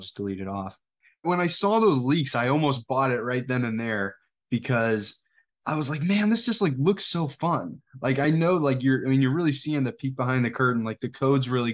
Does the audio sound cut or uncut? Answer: uncut